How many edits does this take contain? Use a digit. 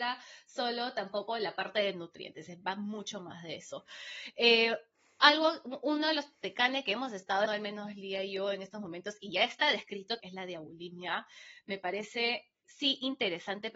3